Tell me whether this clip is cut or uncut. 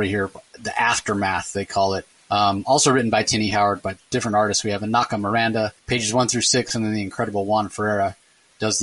cut